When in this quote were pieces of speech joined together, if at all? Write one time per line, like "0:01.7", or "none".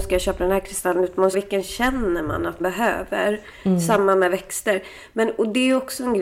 0:01.3
0:02.6